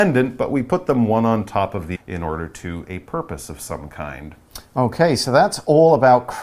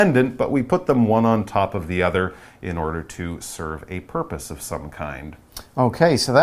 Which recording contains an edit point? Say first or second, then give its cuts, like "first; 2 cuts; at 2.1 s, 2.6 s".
first; 2 cuts; at 2.0 s, 2.8 s